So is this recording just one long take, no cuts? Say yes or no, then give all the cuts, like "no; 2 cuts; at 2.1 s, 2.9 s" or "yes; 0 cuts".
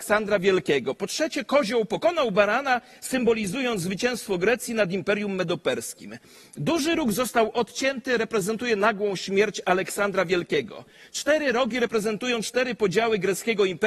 yes; 0 cuts